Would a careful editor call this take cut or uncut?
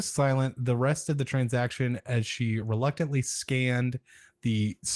uncut